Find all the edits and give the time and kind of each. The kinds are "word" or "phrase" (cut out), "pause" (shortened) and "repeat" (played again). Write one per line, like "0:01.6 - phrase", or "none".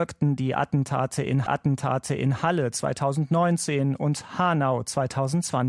0:01.5 - repeat